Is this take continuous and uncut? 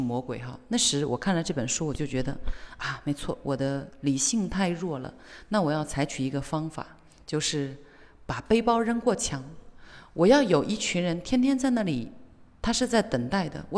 yes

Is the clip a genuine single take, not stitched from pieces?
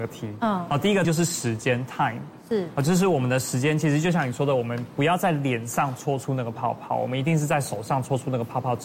no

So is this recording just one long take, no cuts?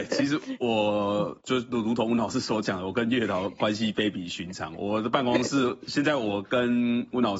no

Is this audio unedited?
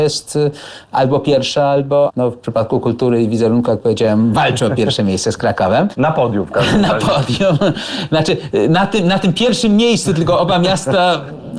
yes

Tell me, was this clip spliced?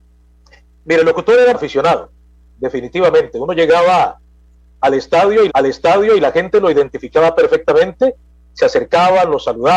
yes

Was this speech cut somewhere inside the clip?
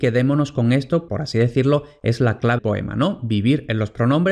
yes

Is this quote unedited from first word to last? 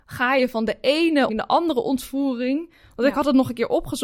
no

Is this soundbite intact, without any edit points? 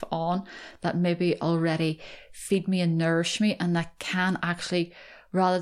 yes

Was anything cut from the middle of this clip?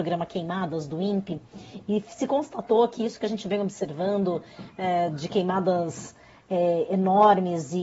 no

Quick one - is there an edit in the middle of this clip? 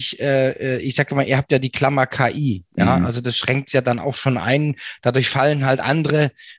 no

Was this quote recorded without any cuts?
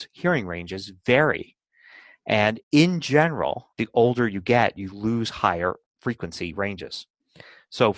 no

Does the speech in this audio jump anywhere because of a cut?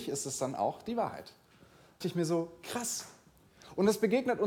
yes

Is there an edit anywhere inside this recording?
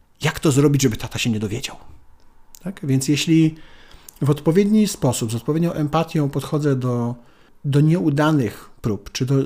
no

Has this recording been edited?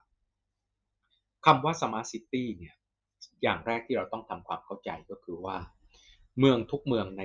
no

